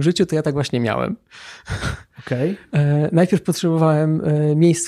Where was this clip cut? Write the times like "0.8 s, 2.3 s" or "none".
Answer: none